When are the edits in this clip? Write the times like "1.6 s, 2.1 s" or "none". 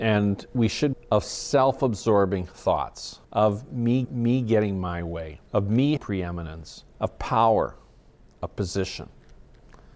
0.9 s, 3.2 s, 4.0 s, 5.5 s, 6.0 s, 6.9 s